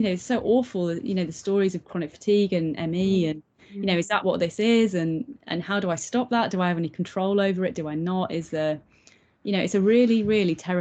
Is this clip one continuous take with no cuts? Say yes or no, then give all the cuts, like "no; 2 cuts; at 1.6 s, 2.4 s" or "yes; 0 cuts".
yes; 0 cuts